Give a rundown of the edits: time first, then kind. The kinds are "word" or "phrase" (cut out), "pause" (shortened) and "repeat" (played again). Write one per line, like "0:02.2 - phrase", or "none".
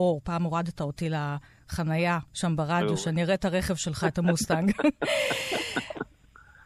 0:02.3 - pause